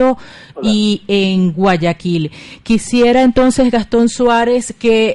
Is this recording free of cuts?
yes; 0 cuts

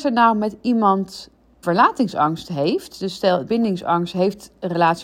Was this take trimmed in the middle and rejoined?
yes; 2 cuts; at 1.6 s, 3.5 s

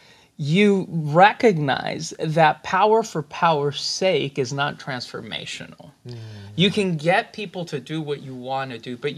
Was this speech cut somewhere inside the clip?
no; 0 cuts

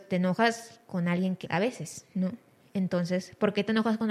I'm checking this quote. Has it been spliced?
yes; 1 cut; at 1.4 s

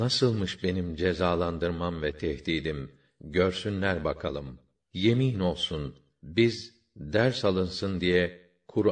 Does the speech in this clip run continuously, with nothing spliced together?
yes; 0 cuts

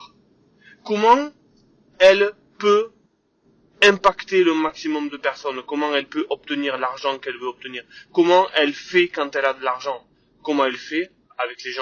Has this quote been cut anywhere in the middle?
no; 0 cuts

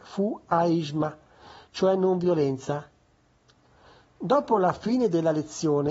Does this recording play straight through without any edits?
yes; 0 cuts

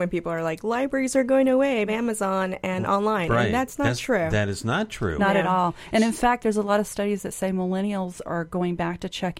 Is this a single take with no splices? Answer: no; 1 cut; at 1.9 s

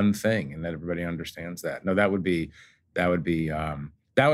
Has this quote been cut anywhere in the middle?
no; 0 cuts

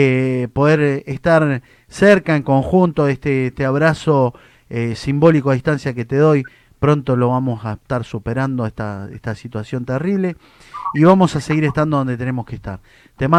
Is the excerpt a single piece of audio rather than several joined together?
yes; 0 cuts

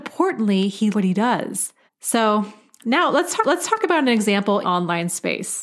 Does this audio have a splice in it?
yes; 4 cuts; at 0.9 s, 1.9 s, 3.4 s, 4.6 s

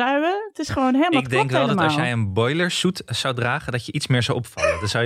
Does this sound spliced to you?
no; 0 cuts

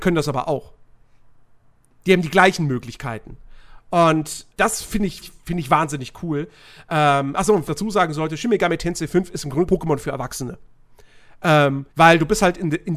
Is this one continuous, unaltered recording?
no; 5 cuts; at 4.5 s, 5.2 s, 7.7 s, 9.7 s, 11.9 s

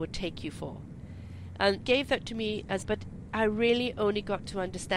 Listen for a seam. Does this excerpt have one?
yes; 2 cuts; at 1.8 s, 2.8 s

